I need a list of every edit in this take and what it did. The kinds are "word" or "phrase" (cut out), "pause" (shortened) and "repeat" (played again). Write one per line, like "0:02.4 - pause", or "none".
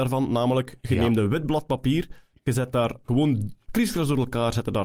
none